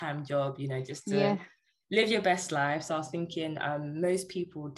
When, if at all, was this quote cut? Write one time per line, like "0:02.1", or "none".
none